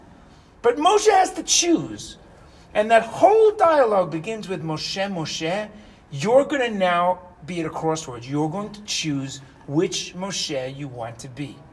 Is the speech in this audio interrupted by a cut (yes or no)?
no